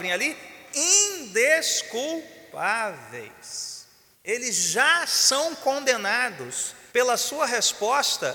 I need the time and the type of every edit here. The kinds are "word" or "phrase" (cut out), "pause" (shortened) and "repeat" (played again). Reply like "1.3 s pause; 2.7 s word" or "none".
4.1 s pause; 6.9 s pause